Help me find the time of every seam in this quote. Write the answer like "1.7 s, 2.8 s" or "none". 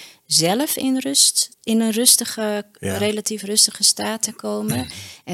1.5 s